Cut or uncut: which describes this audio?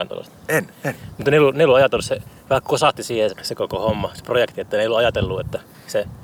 cut